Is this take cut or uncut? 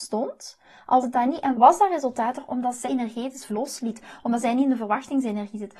cut